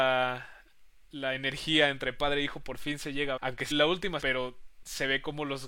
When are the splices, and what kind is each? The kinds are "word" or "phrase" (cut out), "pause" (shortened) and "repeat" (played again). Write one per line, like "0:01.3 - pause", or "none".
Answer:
0:03.4 - word
0:03.7 - phrase
0:04.2 - phrase

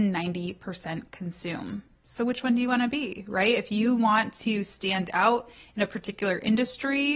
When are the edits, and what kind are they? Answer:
none

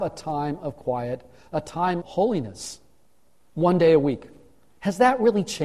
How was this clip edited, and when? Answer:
0:02.0 - word

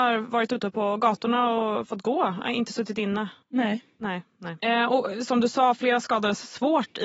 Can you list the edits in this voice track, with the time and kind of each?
0:03.4 - pause

